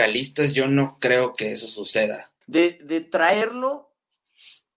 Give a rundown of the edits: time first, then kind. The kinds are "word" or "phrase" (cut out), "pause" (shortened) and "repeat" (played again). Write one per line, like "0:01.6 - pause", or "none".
0:02.4 - pause